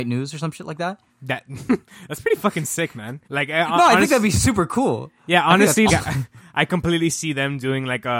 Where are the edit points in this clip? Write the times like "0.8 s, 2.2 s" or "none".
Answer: 1.1 s, 3.2 s, 5.9 s